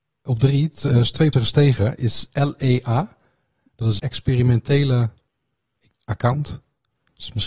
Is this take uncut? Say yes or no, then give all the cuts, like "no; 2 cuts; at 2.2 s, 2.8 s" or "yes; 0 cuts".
no; 3 cuts; at 1.3 s, 4.0 s, 5.9 s